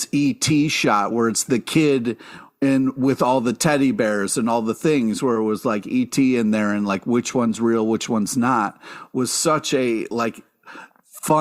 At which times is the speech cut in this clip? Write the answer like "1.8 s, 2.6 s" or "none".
none